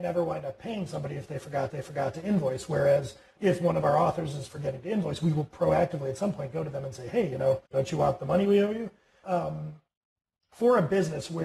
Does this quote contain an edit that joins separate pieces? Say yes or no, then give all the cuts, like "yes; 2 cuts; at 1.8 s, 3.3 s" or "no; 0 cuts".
yes; 4 cuts; at 1.7 s, 3.4 s, 7.7 s, 9.2 s